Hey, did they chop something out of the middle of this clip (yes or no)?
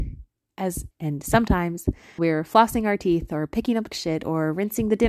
yes